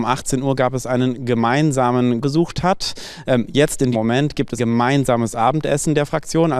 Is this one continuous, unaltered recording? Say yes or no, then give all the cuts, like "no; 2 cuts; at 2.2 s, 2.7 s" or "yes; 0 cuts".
no; 3 cuts; at 2.2 s, 3.9 s, 4.6 s